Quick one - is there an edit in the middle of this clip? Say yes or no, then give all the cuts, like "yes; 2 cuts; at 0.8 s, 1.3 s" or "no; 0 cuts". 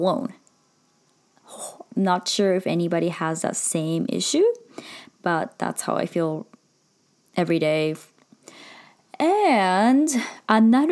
no; 0 cuts